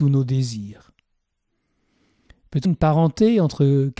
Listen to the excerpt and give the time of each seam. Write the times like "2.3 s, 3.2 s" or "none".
2.6 s